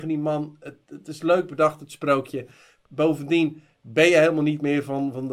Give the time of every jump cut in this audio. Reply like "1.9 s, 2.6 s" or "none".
none

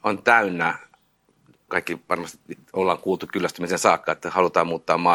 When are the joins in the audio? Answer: none

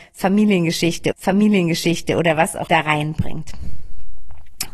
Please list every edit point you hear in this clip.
1.1 s, 2.7 s

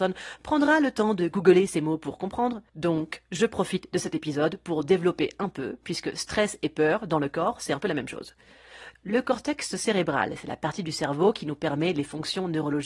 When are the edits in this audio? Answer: 2.7 s

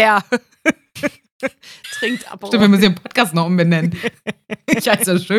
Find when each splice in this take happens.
none

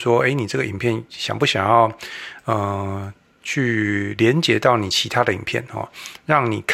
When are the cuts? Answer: none

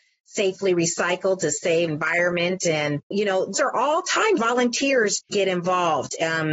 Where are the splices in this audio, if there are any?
1.9 s, 3.1 s, 3.5 s, 4.4 s, 5.3 s

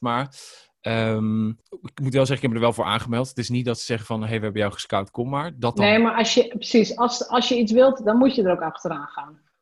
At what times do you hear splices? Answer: 1.6 s

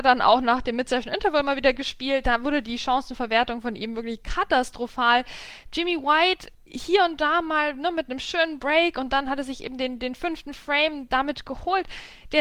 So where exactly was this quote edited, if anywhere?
6.5 s

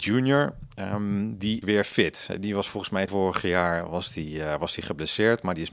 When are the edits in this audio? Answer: 1.6 s, 3.1 s

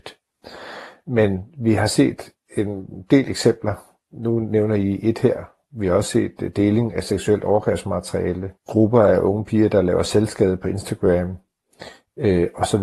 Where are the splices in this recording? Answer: 8.6 s

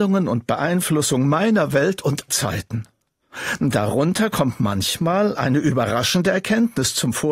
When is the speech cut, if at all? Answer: 2.3 s

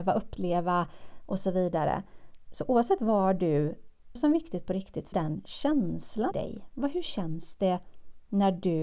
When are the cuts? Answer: 4.2 s, 5.1 s, 6.3 s

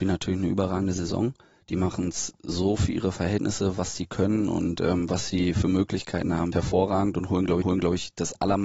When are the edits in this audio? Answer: 6.5 s, 7.6 s

